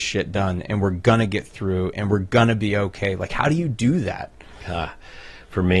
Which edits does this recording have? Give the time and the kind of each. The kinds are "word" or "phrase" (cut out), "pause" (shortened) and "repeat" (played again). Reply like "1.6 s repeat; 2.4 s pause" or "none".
none

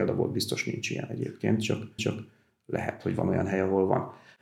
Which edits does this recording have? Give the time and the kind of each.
2.0 s repeat

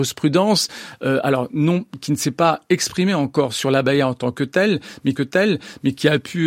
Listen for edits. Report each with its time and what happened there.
5.2 s repeat

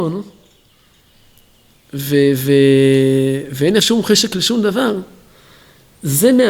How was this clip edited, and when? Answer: 3.8 s word

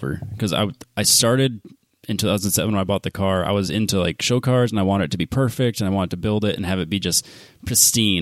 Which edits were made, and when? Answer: none

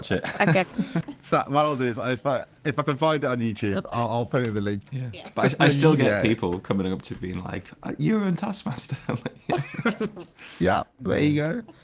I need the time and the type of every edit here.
none

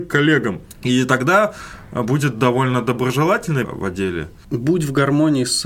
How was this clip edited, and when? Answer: 3.6 s phrase

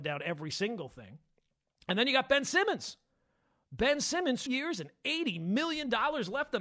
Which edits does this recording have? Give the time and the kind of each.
4.5 s phrase

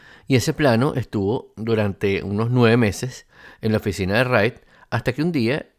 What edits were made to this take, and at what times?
none

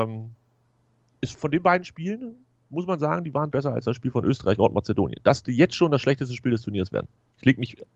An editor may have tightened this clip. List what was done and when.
1.3 s word; 3.5 s word; 4.6 s word; 5.4 s word

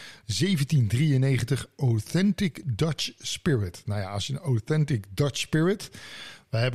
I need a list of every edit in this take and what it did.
none

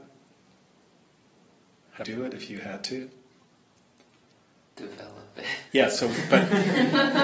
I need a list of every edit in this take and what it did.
2.0 s phrase; 5.7 s pause

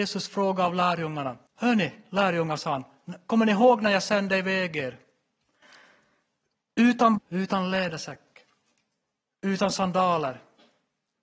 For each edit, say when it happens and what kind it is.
1.5 s pause; 7.2 s word

